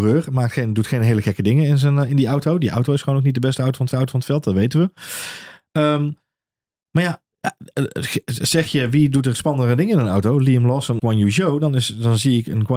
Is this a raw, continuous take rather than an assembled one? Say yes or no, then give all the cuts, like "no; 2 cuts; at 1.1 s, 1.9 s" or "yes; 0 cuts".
no; 3 cuts; at 3.9 s, 7.3 s, 11.0 s